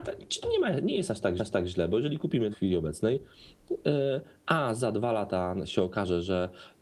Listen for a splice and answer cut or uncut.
cut